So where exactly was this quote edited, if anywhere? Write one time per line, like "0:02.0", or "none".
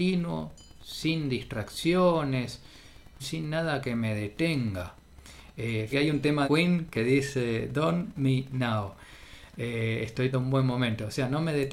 0:03.2
0:05.9
0:06.4
0:08.1
0:10.3